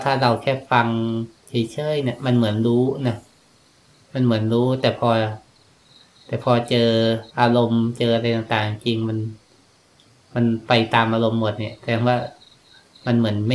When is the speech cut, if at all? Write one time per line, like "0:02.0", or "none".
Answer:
0:01.4
0:07.3